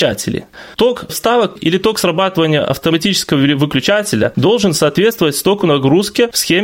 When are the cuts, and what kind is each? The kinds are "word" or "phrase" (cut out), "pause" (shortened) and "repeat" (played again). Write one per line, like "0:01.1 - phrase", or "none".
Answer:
0:01.1 - word
0:01.6 - word